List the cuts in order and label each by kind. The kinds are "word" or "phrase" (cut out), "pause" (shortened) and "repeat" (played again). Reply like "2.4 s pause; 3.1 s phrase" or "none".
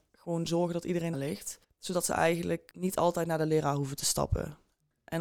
1.1 s phrase; 1.6 s pause; 2.7 s word